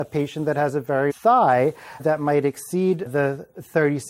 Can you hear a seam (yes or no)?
yes